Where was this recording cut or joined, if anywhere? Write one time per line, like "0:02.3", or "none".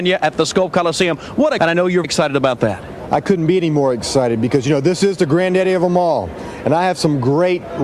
0:01.6
0:02.0